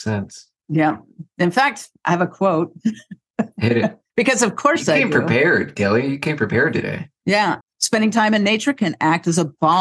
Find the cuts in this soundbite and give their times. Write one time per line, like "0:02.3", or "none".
0:07.6